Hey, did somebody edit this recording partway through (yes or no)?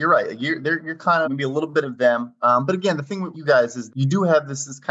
yes